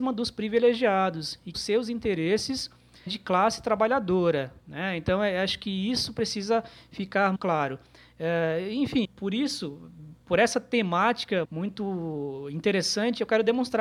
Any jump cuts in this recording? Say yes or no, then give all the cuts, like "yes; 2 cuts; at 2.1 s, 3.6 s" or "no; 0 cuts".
yes; 7 cuts; at 1.5 s, 3.1 s, 4.6 s, 7.4 s, 9.0 s, 10.2 s, 11.4 s